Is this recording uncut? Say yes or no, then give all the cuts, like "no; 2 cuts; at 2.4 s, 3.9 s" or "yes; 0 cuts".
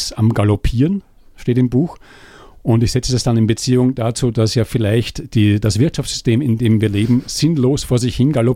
yes; 0 cuts